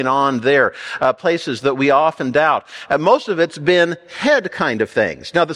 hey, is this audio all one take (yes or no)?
yes